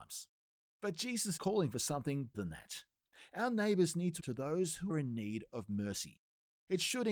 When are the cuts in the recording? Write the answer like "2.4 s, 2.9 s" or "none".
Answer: 1.4 s, 2.3 s, 4.2 s, 4.9 s